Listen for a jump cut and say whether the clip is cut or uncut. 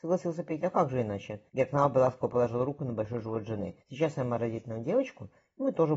cut